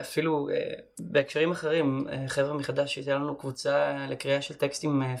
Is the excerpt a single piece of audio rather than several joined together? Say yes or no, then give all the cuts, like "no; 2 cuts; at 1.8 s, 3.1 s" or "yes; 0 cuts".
yes; 0 cuts